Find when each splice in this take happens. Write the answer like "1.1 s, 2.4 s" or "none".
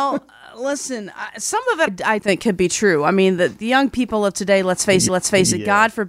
1.9 s, 2.2 s, 5.1 s